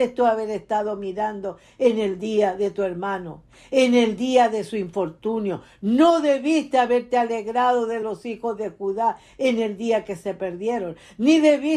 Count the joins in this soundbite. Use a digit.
0